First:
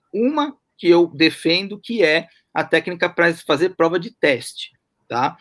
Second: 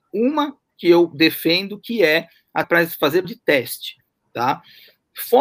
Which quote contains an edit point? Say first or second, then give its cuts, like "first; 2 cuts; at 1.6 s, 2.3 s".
second; 2 cuts; at 2.6 s, 3.2 s